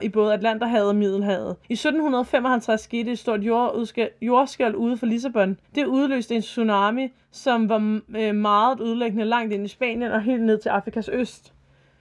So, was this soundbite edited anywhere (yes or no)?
yes